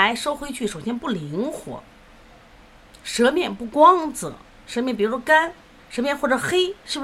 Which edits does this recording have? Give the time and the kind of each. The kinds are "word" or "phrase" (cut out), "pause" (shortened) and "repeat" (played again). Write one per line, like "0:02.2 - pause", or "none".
none